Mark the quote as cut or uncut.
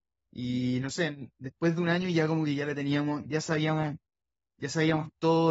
uncut